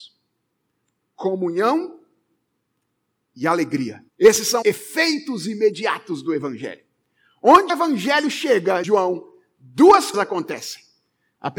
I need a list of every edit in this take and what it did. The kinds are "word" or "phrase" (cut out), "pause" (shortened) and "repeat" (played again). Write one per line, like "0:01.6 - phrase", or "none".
0:04.1 - pause
0:04.6 - word
0:07.7 - word
0:08.8 - word
0:10.1 - word